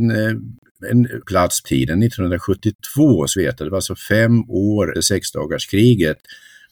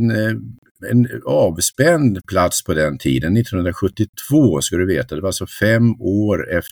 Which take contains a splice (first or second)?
first